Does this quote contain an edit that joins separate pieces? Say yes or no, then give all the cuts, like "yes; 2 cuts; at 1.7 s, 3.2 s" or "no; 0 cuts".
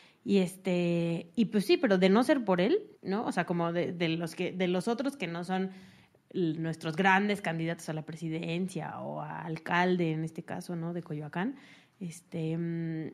yes; 1 cut; at 2.9 s